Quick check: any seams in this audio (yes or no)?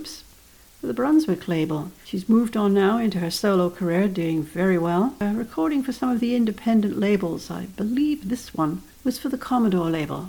yes